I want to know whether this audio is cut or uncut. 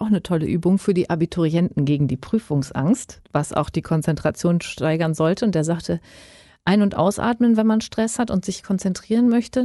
uncut